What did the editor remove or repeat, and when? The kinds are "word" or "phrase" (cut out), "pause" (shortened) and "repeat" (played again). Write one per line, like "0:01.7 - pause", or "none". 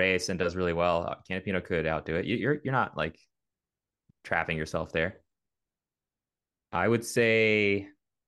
none